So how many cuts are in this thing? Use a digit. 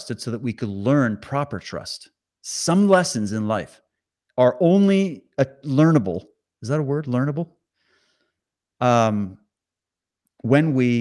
0